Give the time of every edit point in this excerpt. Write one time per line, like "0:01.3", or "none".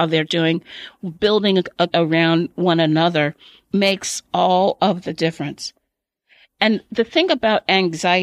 0:01.9